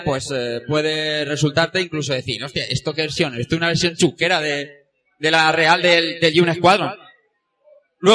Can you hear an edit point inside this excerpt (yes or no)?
no